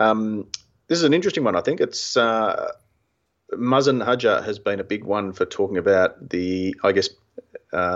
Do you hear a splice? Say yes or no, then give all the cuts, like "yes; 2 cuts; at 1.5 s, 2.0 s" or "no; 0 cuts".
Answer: no; 0 cuts